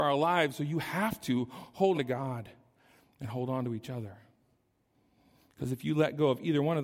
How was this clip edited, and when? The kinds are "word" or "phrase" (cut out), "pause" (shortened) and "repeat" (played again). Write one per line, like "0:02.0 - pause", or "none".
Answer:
0:01.9 - word